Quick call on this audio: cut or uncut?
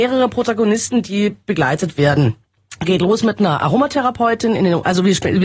uncut